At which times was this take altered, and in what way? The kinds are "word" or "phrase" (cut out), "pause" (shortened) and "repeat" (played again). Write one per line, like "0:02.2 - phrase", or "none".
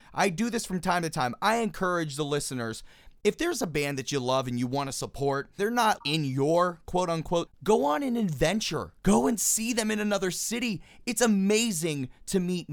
0:05.6 - word
0:06.0 - word
0:07.5 - word